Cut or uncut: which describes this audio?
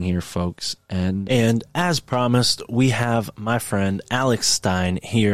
uncut